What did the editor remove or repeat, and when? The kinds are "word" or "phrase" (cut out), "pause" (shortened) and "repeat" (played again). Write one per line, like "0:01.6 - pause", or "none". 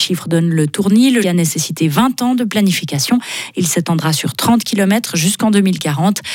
0:01.2 - word